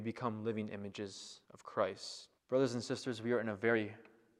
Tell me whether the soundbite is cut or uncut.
cut